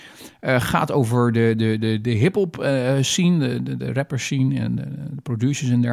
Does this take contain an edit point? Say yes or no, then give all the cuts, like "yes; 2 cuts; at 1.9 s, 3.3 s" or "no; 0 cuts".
no; 0 cuts